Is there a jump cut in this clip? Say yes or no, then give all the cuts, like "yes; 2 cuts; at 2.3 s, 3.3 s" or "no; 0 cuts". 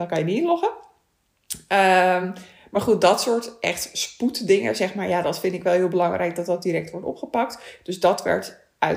no; 0 cuts